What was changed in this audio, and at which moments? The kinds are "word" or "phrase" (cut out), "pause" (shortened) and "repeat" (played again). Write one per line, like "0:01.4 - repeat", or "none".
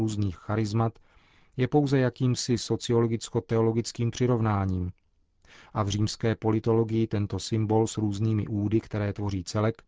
none